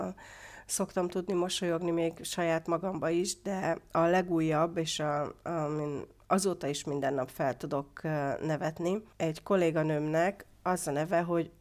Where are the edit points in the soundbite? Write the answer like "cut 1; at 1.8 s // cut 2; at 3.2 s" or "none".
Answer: cut 1; at 9.1 s